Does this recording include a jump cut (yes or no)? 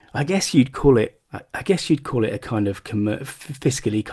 yes